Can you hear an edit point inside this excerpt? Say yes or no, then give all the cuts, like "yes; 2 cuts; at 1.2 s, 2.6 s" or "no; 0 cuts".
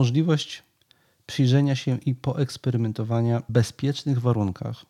yes; 1 cut; at 3.5 s